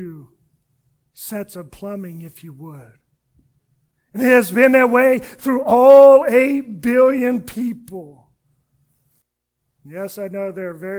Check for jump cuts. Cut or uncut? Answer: uncut